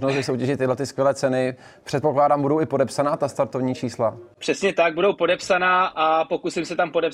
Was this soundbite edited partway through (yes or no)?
no